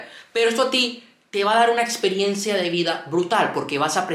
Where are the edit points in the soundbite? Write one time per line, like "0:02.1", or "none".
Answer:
none